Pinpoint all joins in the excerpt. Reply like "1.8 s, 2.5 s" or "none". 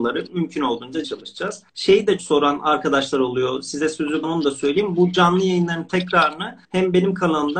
1.0 s, 1.7 s, 2.2 s, 4.2 s, 6.6 s

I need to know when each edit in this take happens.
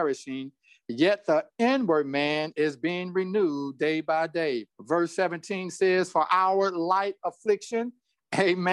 4.7 s

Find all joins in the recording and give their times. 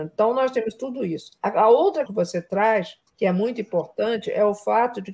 2.1 s, 3.1 s

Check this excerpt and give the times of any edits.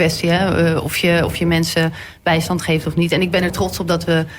none

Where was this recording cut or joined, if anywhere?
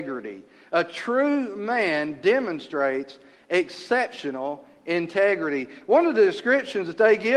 none

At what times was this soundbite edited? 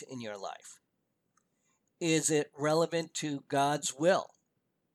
none

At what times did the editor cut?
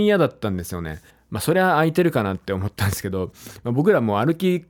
1.1 s

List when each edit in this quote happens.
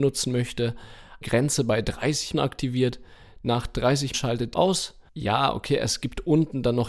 1.2 s, 2.3 s, 4.1 s, 4.5 s, 5.1 s

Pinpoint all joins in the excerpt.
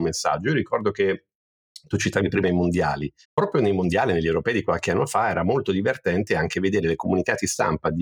3.2 s

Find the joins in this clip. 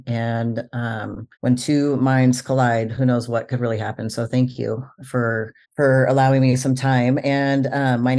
1.3 s, 5.6 s

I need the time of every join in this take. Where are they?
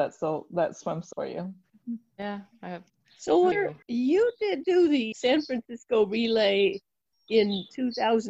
1.1 s, 2.9 s, 3.5 s, 3.8 s, 4.6 s, 5.1 s, 7.3 s

